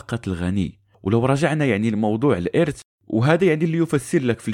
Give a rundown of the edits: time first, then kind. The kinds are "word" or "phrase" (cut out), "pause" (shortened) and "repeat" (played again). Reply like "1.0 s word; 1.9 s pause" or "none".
none